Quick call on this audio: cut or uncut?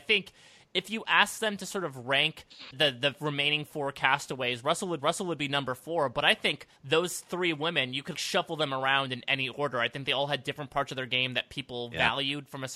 cut